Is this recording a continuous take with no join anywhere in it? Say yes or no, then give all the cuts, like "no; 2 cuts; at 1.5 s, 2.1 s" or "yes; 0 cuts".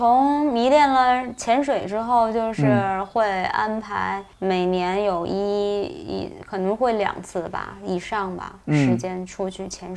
no; 1 cut; at 4.3 s